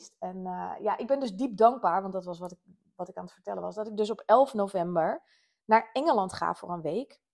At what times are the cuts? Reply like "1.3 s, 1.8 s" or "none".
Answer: none